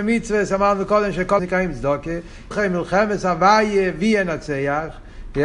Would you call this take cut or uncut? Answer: cut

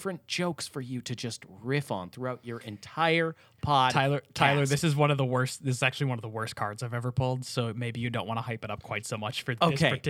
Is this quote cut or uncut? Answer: uncut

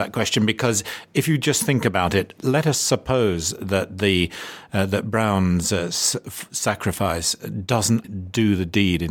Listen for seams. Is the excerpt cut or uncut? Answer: cut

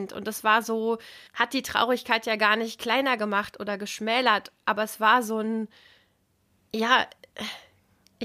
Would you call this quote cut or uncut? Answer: cut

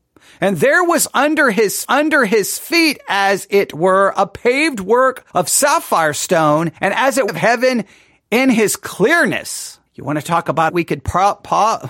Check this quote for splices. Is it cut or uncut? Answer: cut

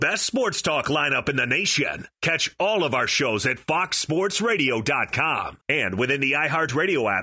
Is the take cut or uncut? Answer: cut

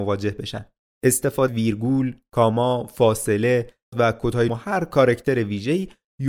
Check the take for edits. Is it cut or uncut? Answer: cut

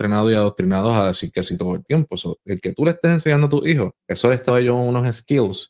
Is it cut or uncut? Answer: cut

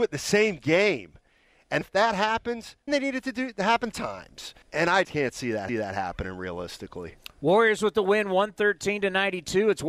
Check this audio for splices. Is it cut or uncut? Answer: cut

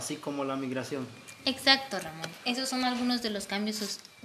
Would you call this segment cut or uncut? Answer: uncut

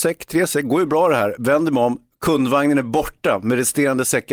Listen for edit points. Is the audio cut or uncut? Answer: uncut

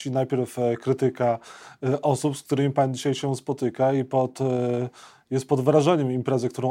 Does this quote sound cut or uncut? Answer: uncut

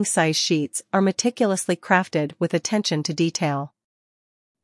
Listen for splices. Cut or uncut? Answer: uncut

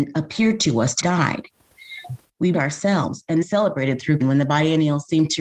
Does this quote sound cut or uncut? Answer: cut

